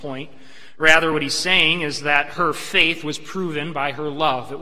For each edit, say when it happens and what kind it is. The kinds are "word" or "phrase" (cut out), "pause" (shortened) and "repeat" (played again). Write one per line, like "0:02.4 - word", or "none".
none